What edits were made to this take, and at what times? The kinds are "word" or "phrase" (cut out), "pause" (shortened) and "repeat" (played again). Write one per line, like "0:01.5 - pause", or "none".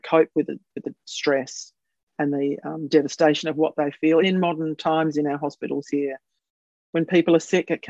0:04.2 - word